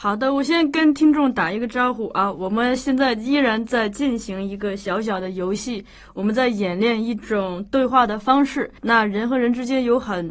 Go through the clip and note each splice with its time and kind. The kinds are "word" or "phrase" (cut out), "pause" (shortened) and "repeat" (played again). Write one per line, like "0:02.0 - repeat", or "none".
0:08.8 - pause